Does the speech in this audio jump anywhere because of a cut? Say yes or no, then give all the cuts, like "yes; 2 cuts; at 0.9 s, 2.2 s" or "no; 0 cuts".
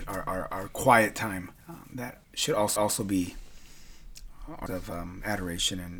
yes; 4 cuts; at 1.6 s, 2.2 s, 2.8 s, 4.7 s